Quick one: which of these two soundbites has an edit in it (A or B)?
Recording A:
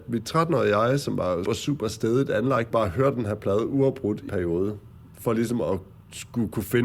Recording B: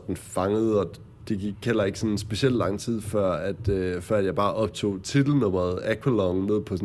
A